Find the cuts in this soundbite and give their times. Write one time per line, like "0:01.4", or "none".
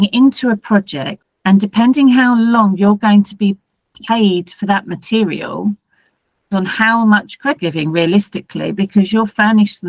0:06.5
0:07.6

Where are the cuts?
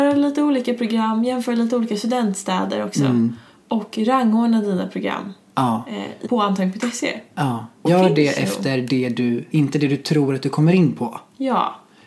0:06.2
0:07.9
0:09.5

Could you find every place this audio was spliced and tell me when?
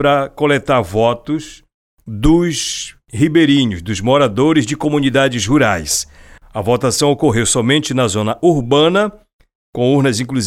none

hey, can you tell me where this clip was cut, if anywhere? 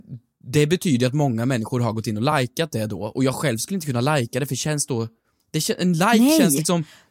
none

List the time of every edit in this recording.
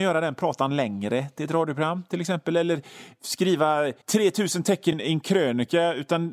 0:04.0
0:04.9

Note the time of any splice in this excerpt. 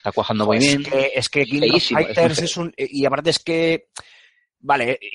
none

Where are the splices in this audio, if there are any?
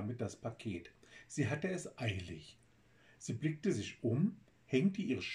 none

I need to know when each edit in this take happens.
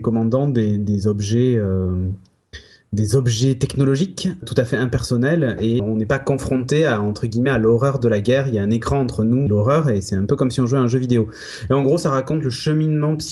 0:04.4
0:05.8
0:09.5

